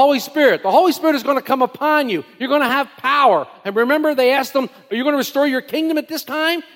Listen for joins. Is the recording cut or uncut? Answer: uncut